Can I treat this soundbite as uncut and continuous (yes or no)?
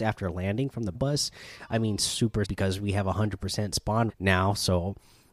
no